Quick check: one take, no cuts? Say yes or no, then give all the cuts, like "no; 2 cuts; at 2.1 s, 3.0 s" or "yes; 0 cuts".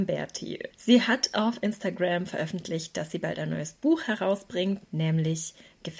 yes; 0 cuts